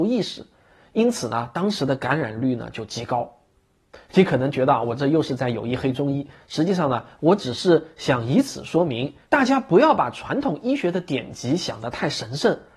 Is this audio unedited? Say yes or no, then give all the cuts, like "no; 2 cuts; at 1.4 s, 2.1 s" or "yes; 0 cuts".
no; 1 cut; at 9.2 s